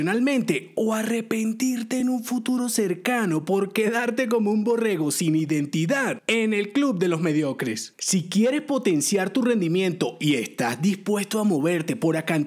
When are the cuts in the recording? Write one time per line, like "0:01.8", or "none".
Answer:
none